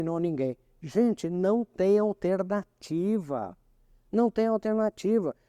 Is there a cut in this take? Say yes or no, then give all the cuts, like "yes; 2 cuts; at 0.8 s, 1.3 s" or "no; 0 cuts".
no; 0 cuts